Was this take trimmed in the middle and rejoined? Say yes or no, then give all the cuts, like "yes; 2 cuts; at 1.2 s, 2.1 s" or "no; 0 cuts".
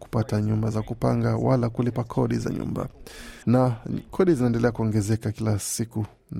yes; 1 cut; at 3.4 s